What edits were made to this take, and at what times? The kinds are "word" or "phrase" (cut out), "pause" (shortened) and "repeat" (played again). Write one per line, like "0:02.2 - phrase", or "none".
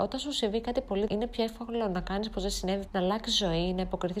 0:01.1 - word
0:02.9 - word